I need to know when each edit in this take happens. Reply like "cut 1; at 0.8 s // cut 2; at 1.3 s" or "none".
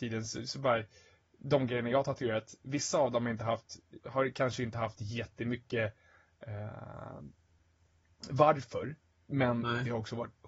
none